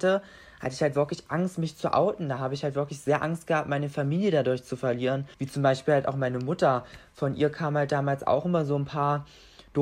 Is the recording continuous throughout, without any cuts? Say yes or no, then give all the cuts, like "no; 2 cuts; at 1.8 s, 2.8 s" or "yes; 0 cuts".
no; 1 cut; at 5.3 s